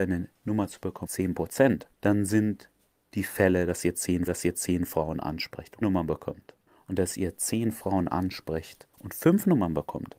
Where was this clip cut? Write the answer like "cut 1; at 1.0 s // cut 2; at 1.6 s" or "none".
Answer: cut 1; at 1.1 s // cut 2; at 1.9 s // cut 3; at 3.0 s // cut 4; at 4.3 s // cut 5; at 5.8 s // cut 6; at 6.7 s // cut 7; at 8.9 s

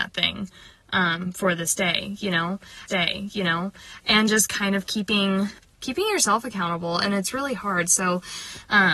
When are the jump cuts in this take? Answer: cut 1; at 2.9 s // cut 2; at 5.6 s

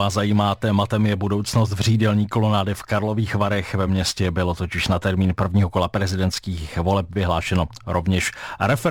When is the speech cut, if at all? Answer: none

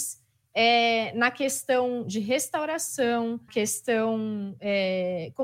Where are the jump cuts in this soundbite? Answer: cut 1; at 3.5 s

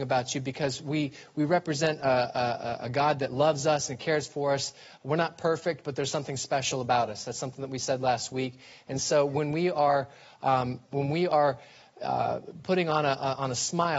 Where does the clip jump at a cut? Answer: none

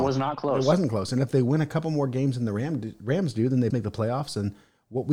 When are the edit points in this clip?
cut 1; at 3.7 s

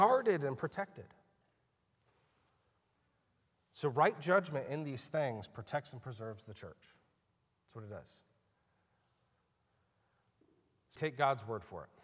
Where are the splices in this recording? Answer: cut 1; at 11.0 s

